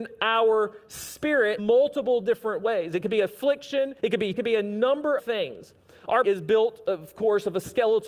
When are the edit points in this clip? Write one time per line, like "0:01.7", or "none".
0:01.6
0:04.0
0:04.4
0:05.2
0:06.2